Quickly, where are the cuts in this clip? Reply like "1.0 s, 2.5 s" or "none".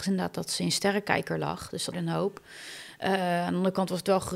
1.9 s